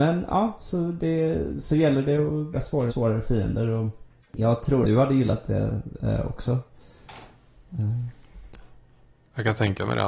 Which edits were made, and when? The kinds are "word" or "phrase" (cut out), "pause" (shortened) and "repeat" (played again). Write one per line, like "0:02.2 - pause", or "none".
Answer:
0:02.5 - word
0:02.9 - word
0:04.2 - pause
0:04.8 - word